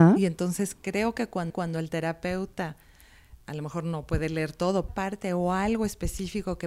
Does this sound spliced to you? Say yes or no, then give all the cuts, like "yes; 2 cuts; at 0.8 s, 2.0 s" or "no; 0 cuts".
yes; 2 cuts; at 1.5 s, 4.9 s